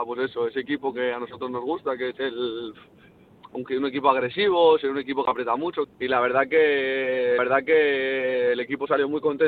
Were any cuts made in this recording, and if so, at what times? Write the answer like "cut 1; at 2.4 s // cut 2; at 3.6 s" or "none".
cut 1; at 5.8 s // cut 2; at 7.4 s